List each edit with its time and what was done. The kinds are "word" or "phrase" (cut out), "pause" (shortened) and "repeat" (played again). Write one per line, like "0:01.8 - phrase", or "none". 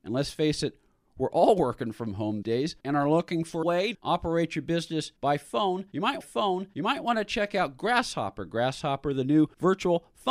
0:02.4 - word
0:02.8 - pause
0:03.6 - phrase
0:03.9 - word
0:05.2 - pause
0:06.2 - repeat